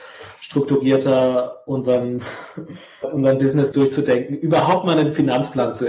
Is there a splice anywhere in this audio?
yes; 2 cuts; at 3.0 s, 3.7 s

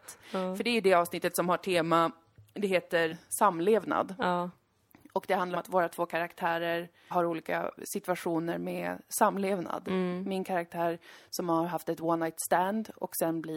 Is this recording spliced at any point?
yes; 4 cuts; at 3.1 s, 5.5 s, 7.1 s, 7.8 s

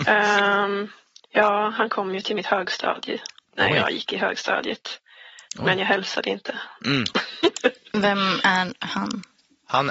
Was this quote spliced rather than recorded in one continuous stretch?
no; 0 cuts

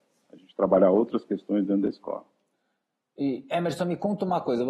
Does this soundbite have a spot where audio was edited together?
no; 0 cuts

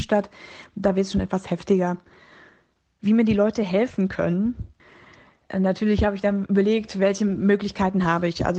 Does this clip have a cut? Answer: no; 0 cuts

